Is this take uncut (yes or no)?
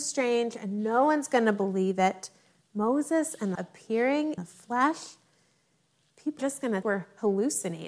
no